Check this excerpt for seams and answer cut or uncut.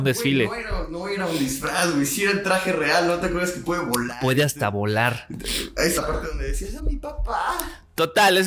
cut